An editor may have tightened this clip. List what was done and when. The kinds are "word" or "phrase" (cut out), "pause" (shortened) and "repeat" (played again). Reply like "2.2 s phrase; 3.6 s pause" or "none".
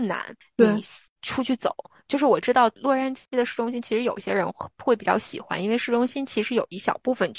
none